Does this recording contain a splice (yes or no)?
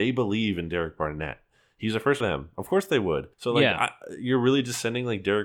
yes